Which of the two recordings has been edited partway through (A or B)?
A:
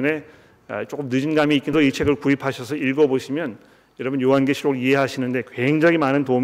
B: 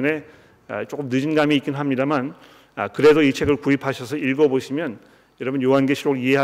A